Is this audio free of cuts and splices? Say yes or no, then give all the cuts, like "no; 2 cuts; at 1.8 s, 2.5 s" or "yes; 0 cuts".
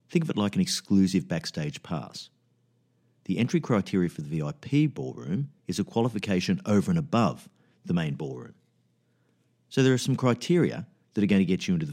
no; 1 cut; at 5.6 s